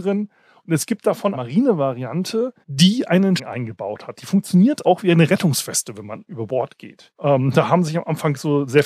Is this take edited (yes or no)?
yes